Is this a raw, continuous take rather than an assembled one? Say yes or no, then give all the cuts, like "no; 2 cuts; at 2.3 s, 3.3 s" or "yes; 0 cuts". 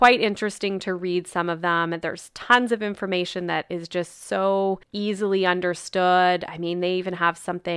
no; 1 cut; at 4.8 s